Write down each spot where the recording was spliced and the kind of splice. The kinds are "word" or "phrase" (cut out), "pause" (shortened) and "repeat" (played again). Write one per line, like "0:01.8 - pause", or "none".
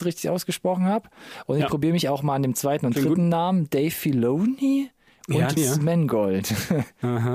0:05.6 - word